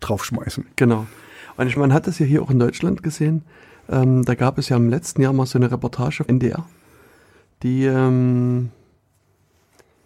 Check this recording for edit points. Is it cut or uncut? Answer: cut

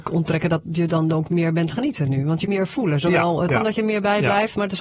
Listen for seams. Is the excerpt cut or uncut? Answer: cut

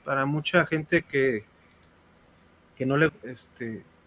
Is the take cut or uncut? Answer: cut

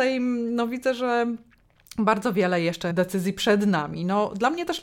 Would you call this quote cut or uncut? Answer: cut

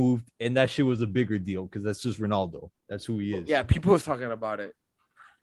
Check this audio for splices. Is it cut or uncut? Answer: cut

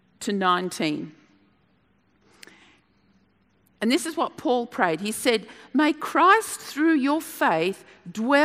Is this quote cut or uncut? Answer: uncut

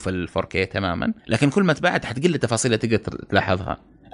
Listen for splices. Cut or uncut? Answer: cut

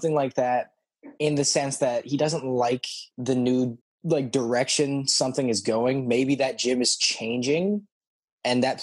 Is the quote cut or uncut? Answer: cut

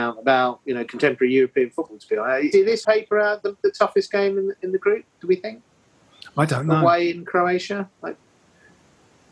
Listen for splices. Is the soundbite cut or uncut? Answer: cut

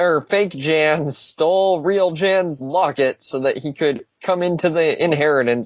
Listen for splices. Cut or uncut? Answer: uncut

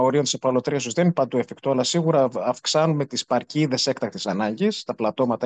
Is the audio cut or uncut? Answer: uncut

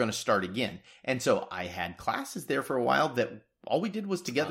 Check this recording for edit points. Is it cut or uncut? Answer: uncut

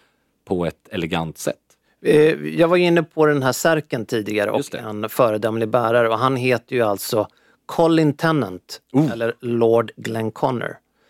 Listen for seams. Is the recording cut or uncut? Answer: uncut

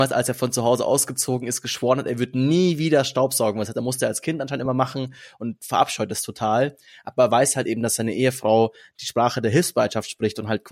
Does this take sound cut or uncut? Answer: uncut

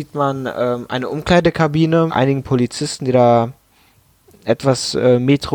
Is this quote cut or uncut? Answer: cut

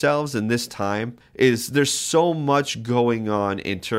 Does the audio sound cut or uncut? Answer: cut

